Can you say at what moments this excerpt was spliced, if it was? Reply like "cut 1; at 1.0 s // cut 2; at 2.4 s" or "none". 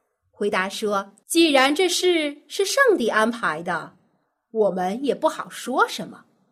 cut 1; at 1.2 s